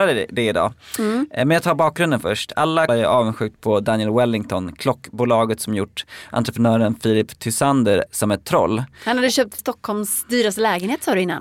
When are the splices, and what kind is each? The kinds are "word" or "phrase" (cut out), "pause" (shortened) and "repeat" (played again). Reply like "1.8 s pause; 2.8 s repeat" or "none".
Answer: 2.9 s word; 8.1 s word; 9.6 s word